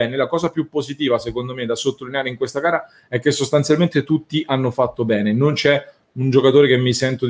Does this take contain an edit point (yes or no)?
no